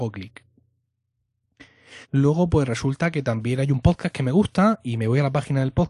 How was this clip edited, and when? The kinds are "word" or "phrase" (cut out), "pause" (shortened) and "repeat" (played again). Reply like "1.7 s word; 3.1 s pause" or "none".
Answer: 2.0 s pause